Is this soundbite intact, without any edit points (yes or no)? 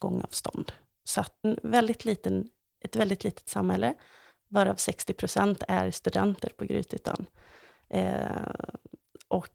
no